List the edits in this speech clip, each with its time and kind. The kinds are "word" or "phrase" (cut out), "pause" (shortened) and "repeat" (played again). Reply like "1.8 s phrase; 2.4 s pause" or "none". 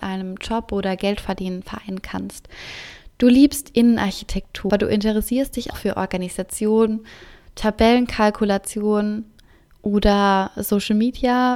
4.7 s word; 5.7 s word

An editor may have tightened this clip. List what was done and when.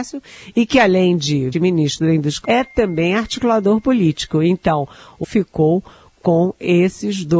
1.5 s word; 2.4 s word; 5.2 s word

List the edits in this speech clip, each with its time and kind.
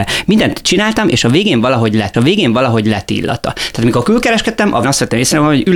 2.1 s repeat; 4.8 s word

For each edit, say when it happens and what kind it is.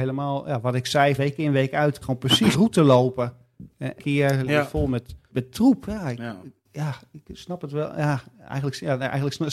1.2 s word; 2.0 s phrase; 2.5 s word; 4.0 s word; 4.5 s phrase; 5.3 s word

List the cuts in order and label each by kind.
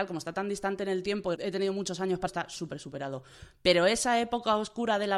1.4 s word; 2.3 s word

